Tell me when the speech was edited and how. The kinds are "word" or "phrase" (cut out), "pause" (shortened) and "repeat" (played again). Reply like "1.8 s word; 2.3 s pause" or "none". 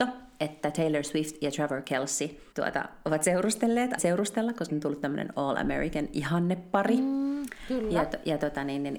2.5 s pause; 4.0 s word; 4.7 s word